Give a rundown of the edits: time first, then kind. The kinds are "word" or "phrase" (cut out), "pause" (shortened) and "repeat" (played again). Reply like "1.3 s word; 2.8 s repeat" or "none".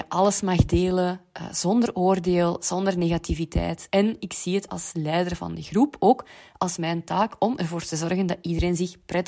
none